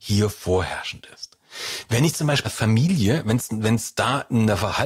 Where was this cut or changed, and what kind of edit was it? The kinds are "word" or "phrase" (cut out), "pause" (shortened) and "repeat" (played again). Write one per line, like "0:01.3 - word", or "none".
0:02.4 - word